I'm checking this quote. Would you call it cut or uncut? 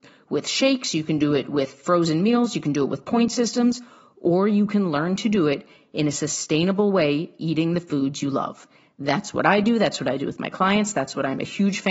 uncut